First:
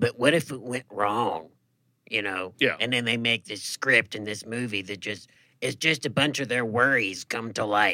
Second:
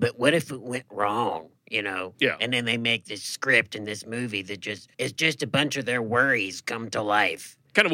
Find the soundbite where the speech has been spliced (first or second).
second